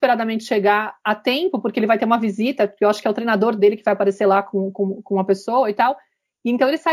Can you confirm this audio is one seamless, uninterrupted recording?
yes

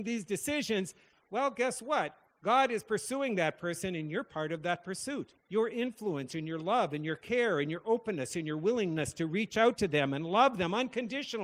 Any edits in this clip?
yes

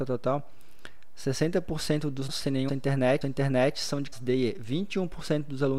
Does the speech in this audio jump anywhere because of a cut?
yes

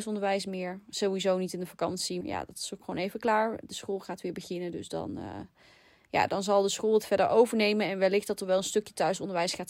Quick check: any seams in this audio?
yes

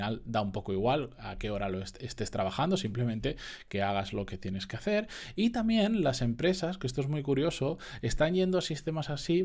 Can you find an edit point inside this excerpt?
no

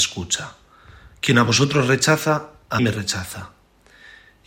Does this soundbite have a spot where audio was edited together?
yes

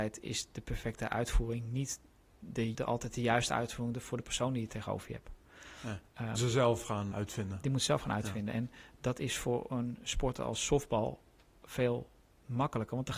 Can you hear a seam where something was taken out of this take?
yes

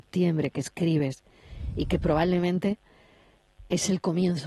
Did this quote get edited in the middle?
no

